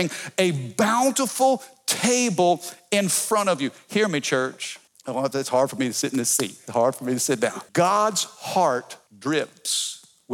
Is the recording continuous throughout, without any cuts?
no; 3 cuts; at 4.9 s, 7.7 s, 9.1 s

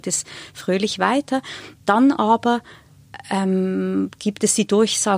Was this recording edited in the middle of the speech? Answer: no; 0 cuts

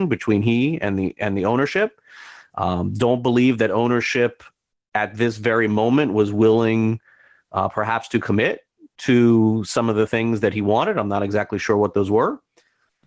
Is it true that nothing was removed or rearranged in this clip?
yes; 0 cuts

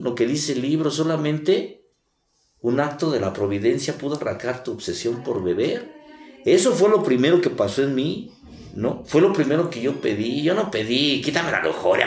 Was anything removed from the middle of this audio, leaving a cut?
no; 0 cuts

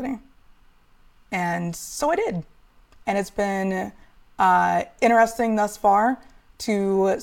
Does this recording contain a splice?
no; 0 cuts

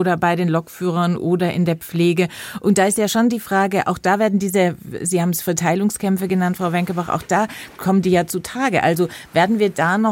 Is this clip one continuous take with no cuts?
yes; 0 cuts

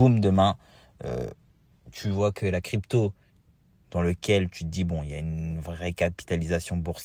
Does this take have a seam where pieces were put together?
no; 0 cuts

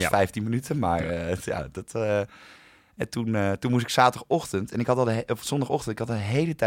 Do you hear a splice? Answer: no; 0 cuts

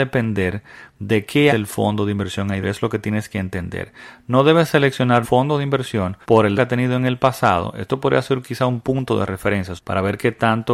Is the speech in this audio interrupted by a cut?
yes; 6 cuts; at 1.5 s, 2.6 s, 5.2 s, 6.2 s, 6.6 s, 9.8 s

